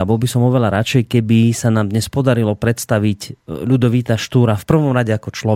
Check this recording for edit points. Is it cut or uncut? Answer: uncut